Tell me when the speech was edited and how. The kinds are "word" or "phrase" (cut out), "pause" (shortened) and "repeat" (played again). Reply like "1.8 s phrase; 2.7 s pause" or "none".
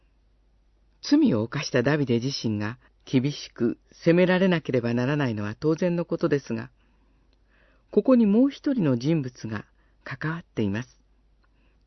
2.9 s pause